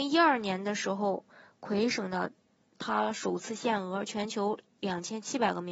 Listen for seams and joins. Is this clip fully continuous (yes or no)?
yes